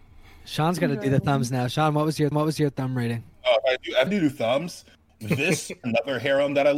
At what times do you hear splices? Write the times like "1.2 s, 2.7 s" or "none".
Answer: 2.3 s, 4.1 s, 5.1 s, 5.8 s